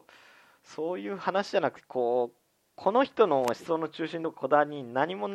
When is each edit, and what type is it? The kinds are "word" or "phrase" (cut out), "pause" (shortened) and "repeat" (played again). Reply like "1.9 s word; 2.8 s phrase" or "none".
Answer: none